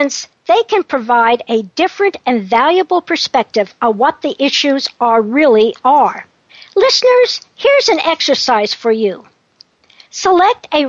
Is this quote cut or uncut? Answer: cut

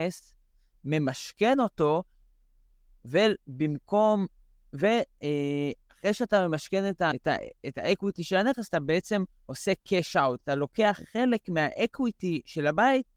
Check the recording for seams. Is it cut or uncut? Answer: uncut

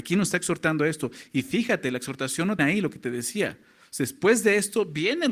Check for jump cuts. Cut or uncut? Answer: cut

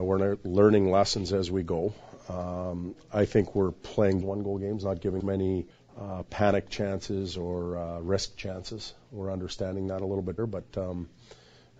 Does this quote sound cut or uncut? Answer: cut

